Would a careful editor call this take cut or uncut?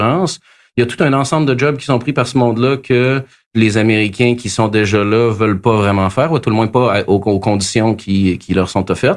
uncut